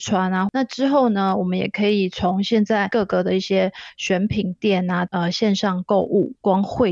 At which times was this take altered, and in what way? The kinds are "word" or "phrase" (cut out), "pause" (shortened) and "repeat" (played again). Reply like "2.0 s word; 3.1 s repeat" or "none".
none